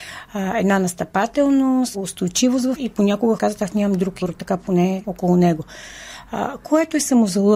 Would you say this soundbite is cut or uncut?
cut